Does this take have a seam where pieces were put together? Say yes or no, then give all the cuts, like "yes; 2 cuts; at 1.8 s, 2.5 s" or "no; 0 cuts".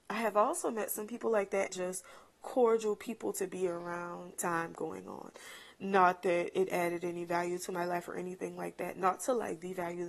yes; 2 cuts; at 1.7 s, 4.4 s